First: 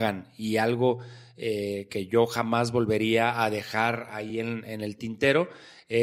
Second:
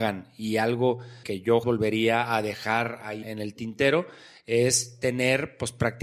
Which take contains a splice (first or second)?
second